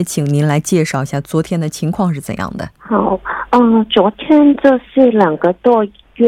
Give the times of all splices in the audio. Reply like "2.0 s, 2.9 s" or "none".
2.8 s